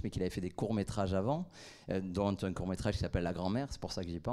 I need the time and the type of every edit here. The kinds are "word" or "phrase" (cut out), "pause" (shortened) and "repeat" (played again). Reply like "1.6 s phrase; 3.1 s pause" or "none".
none